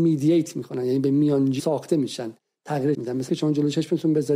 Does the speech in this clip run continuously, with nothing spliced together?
no; 3 cuts; at 1.6 s, 2.9 s, 3.3 s

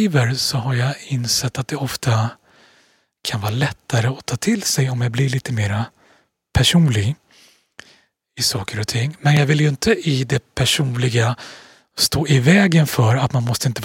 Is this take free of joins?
yes; 0 cuts

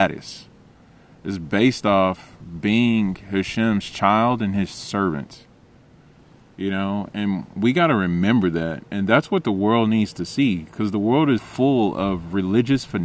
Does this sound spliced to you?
yes; 1 cut; at 11.4 s

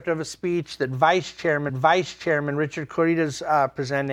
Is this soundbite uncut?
no; 1 cut; at 1.7 s

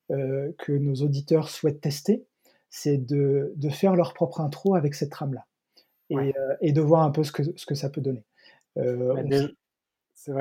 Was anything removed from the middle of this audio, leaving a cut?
no; 0 cuts

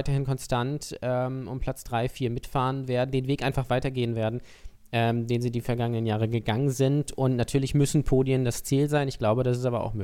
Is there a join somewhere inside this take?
no; 0 cuts

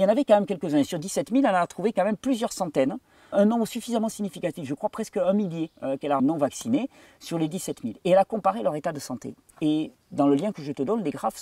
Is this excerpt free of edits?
no; 4 cuts; at 3.3 s, 5.7 s, 6.2 s, 10.0 s

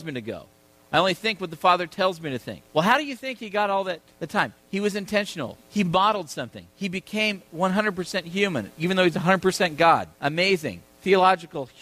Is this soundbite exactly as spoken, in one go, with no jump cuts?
no; 6 cuts; at 2.7 s, 4.1 s, 4.6 s, 5.6 s, 7.5 s, 10.1 s

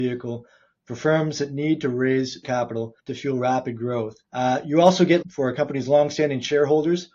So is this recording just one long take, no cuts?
no; 4 cuts; at 2.4 s, 3.0 s, 4.2 s, 5.2 s

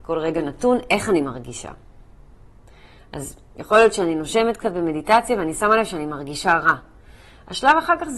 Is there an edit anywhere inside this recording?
no; 0 cuts

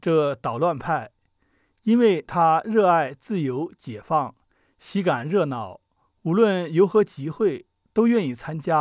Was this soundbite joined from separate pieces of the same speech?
no; 0 cuts

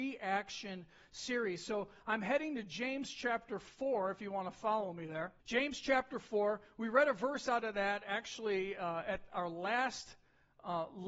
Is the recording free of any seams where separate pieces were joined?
no; 1 cut; at 5.4 s

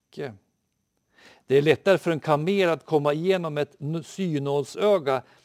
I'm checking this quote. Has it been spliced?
no; 0 cuts

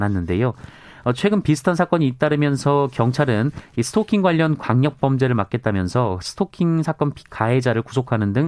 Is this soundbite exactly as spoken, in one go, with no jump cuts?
yes; 0 cuts

